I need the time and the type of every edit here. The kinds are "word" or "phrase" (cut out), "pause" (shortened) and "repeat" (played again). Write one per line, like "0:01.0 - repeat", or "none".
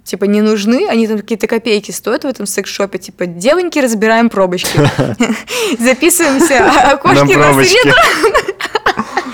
none

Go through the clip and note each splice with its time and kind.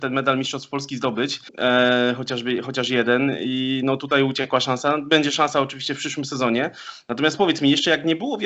0:01.5 - pause

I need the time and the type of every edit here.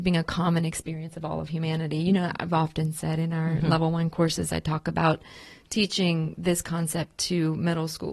none

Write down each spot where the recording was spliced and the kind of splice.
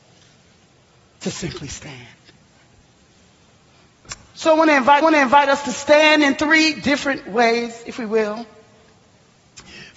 0:05.0 - repeat

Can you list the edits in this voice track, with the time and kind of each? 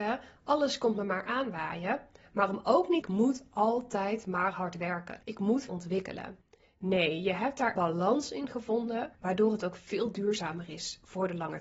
0:03.0 - phrase
0:05.2 - pause
0:05.7 - phrase
0:07.7 - word
0:09.1 - pause

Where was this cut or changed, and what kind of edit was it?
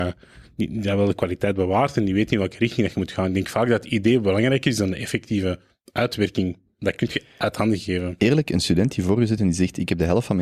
none

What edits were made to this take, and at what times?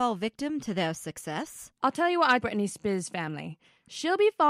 0:01.8 - pause
0:02.4 - word

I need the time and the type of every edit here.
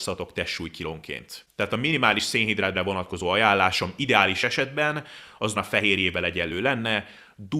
0:02.7 - word
0:05.6 - word

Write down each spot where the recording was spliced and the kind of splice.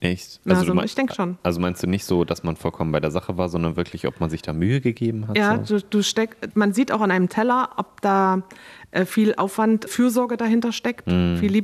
0:06.5 - word
0:09.9 - phrase

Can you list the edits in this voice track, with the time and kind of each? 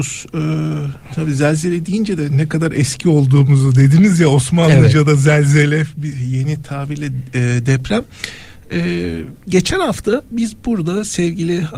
none

